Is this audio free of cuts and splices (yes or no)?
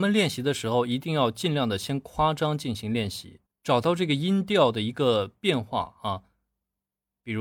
no